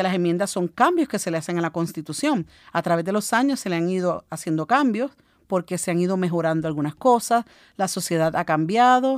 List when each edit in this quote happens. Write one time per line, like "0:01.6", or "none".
none